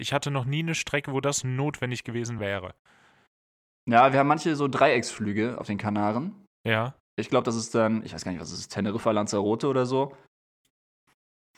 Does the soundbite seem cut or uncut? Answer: uncut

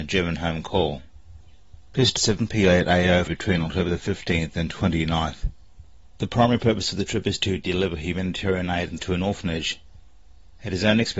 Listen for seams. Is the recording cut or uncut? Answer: cut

